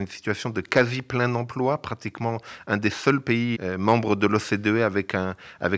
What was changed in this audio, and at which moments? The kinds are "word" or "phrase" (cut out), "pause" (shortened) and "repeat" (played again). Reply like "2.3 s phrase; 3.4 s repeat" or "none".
3.5 s word